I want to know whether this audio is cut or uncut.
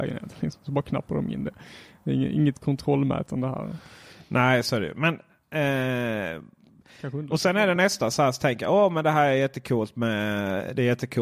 uncut